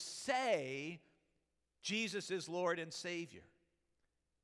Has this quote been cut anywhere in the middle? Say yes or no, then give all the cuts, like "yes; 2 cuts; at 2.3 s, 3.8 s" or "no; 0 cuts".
no; 0 cuts